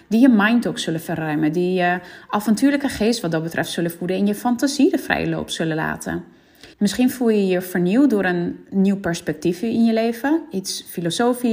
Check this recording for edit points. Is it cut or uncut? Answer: cut